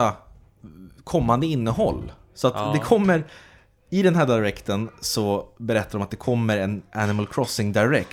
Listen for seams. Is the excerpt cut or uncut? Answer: uncut